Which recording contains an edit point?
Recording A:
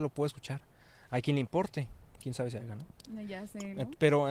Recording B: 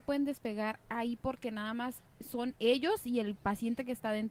B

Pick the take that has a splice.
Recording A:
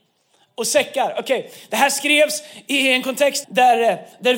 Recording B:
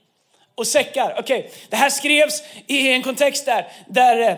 A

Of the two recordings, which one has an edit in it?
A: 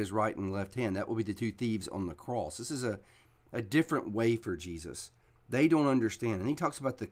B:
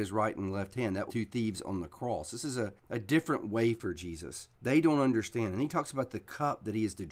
B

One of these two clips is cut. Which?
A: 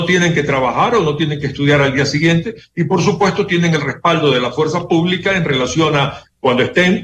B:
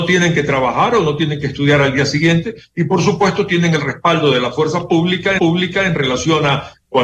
B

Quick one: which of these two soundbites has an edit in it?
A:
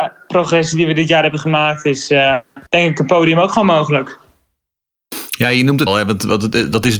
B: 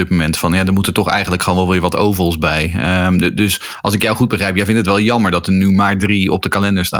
A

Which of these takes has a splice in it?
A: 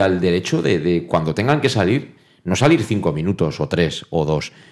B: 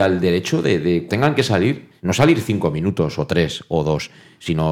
B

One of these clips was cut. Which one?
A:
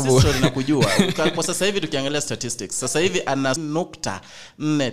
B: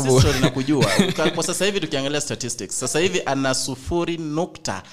A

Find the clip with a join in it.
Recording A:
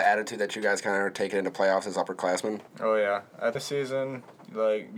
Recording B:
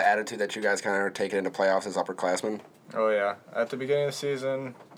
A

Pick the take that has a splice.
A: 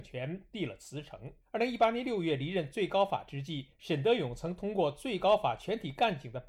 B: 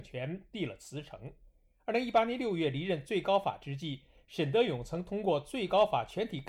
A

